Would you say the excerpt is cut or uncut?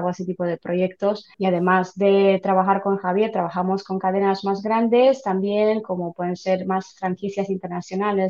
cut